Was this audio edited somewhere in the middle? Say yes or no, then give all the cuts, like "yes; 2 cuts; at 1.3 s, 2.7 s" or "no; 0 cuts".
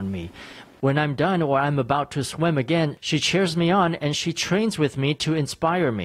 no; 0 cuts